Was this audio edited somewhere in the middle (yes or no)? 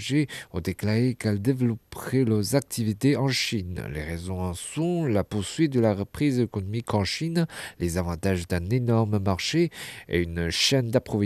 no